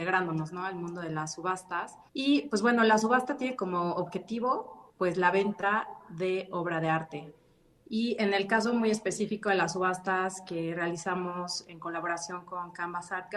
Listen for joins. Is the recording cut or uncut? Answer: cut